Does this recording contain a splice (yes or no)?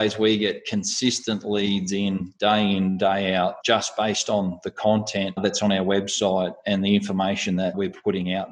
no